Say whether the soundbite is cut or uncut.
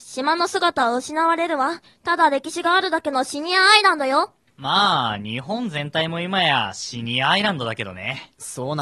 cut